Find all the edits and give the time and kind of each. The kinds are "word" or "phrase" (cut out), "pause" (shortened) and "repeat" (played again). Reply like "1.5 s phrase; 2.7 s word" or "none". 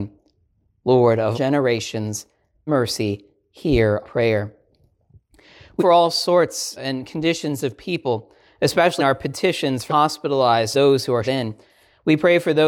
1.3 s word; 2.7 s word; 4.0 s word; 5.8 s word; 6.8 s word; 9.0 s word; 9.9 s word; 10.7 s word; 11.2 s word